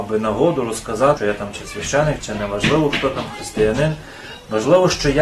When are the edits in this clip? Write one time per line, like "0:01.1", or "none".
0:01.2
0:02.2